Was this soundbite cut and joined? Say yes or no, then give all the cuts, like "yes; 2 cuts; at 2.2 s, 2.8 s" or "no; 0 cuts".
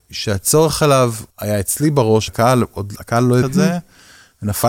yes; 3 cuts; at 1.3 s, 2.3 s, 3.4 s